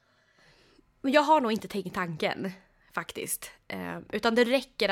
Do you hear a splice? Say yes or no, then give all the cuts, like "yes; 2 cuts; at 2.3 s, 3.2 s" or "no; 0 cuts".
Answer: no; 0 cuts